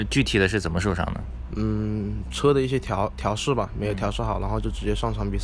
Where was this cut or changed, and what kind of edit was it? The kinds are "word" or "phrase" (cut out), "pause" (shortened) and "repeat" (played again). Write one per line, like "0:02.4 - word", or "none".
none